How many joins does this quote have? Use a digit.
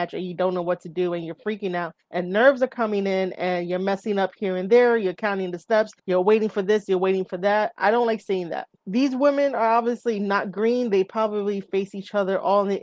3